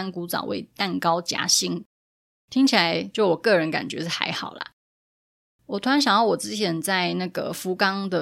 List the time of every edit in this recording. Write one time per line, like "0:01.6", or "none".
none